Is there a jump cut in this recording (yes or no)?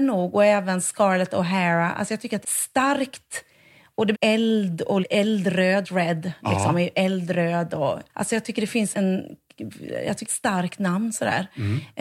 yes